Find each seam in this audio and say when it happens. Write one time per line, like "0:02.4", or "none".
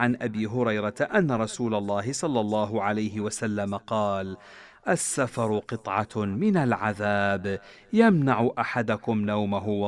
none